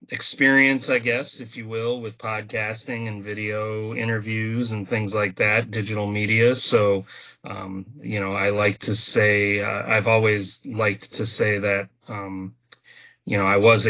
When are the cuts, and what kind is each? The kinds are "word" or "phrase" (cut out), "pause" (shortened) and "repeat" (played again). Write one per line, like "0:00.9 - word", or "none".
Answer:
none